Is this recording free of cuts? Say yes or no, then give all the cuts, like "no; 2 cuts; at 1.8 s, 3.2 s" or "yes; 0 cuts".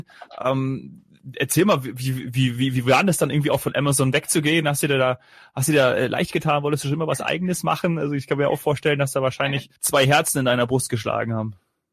no; 1 cut; at 9.8 s